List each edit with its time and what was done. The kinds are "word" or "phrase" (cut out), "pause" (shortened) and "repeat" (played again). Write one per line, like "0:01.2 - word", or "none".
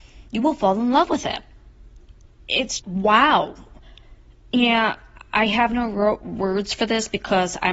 0:02.8 - word